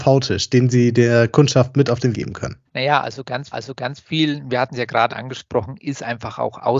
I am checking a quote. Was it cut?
yes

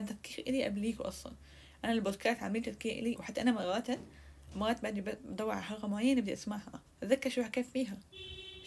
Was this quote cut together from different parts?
yes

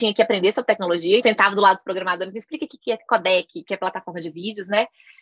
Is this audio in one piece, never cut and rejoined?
no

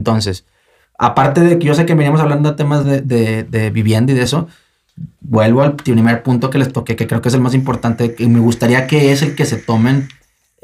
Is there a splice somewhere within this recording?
no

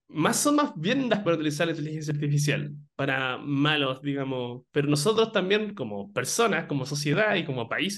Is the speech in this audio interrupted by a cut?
yes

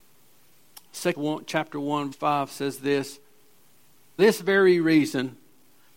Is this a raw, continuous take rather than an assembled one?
no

